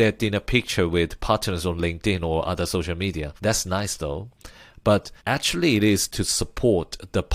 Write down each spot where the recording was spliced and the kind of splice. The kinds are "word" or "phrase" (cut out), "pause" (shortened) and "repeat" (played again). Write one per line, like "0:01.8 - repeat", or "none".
0:03.4 - pause
0:05.2 - pause